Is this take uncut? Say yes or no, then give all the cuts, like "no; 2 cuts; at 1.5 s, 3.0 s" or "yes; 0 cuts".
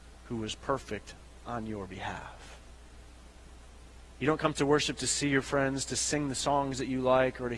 yes; 0 cuts